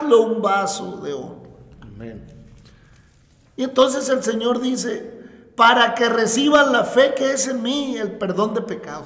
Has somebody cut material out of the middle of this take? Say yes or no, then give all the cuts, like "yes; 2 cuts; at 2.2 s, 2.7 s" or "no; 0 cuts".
no; 0 cuts